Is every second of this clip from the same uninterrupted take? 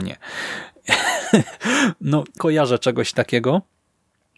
no; 1 cut; at 2.4 s

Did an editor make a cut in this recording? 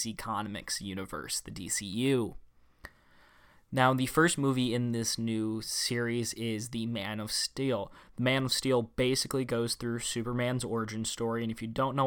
no; 0 cuts

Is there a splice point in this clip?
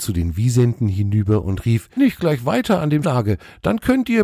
yes; 2 cuts; at 2.0 s, 3.0 s

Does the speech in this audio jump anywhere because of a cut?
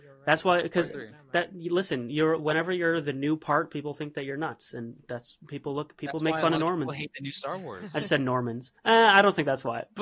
yes; 1 cut; at 8.8 s

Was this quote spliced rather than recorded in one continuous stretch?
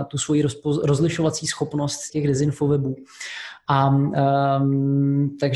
yes; 1 cut; at 2.1 s

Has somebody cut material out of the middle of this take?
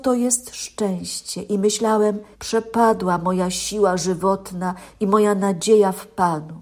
yes; 1 cut; at 2.3 s

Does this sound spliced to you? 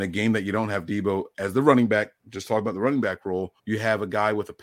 yes; 2 cuts; at 2.2 s, 3.6 s

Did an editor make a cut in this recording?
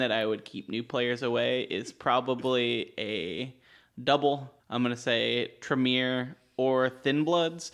no; 0 cuts

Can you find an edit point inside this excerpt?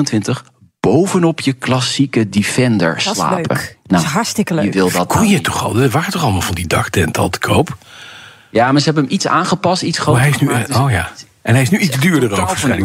no; 0 cuts

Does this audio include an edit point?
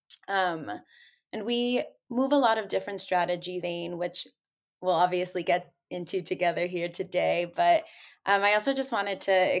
yes; 1 cut; at 3.6 s

